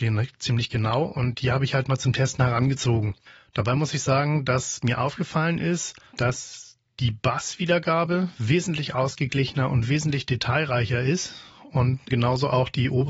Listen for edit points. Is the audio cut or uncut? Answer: cut